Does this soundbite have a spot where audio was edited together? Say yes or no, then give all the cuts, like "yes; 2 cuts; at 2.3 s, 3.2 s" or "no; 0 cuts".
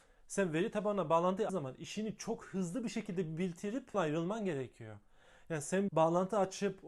yes; 3 cuts; at 1.5 s, 3.9 s, 5.9 s